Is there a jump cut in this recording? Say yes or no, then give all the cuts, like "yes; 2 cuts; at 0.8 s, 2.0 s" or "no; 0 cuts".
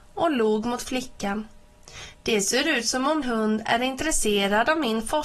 yes; 1 cut; at 3.2 s